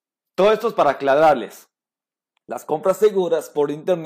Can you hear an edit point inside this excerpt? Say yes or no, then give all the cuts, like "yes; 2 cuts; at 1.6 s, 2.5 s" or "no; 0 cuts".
no; 0 cuts